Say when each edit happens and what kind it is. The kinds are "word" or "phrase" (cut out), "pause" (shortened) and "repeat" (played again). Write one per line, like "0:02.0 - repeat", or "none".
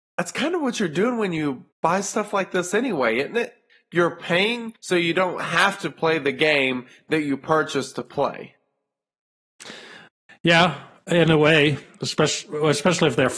0:01.7 - pause
0:04.8 - pause